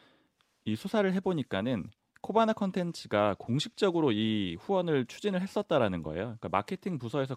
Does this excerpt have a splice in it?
no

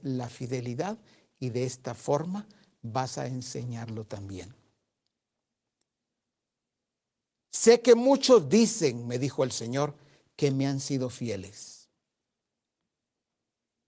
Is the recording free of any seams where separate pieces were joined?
yes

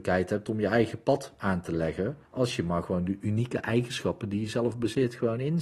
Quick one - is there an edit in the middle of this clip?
yes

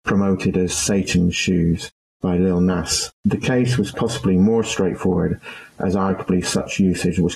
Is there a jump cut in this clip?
no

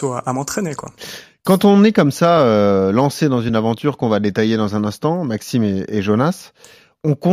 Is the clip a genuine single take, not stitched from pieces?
yes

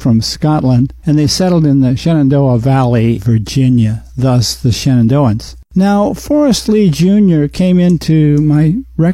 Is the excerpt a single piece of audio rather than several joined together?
no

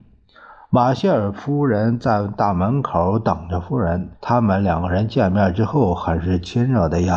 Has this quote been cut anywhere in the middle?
yes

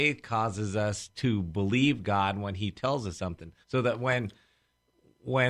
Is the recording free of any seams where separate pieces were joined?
no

